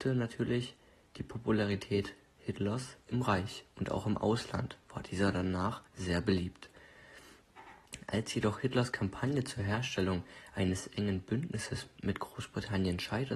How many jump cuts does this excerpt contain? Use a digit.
1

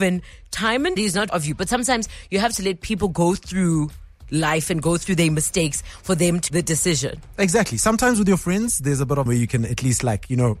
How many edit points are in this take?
4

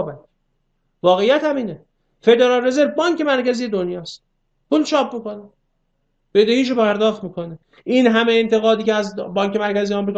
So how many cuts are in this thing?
0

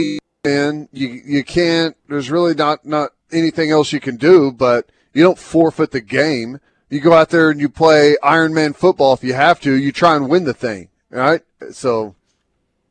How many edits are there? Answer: 3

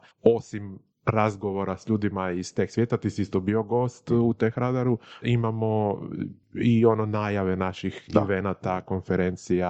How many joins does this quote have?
1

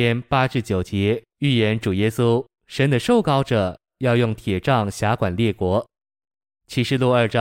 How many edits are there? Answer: 1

